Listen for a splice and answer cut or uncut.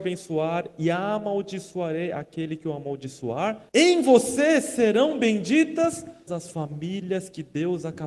cut